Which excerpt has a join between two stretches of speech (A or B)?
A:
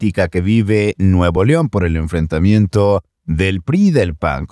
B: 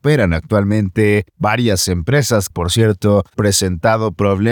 B